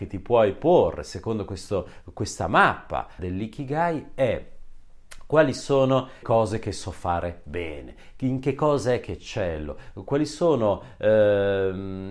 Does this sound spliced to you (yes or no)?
yes